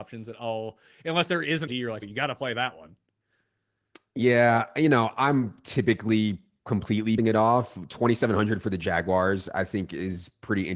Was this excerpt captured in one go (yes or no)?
no